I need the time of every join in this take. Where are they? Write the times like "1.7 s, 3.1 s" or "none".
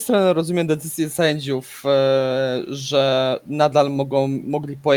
none